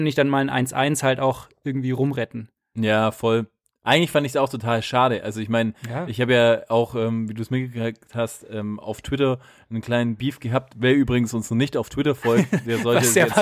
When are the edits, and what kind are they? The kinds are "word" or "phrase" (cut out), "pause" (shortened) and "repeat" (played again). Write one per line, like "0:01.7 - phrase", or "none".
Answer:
none